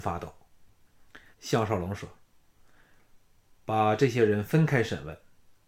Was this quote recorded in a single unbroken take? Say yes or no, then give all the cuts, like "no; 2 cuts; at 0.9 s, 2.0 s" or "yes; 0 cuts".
no; 2 cuts; at 1.3 s, 3.3 s